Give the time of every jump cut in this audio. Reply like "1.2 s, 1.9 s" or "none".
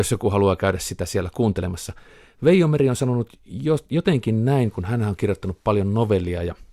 none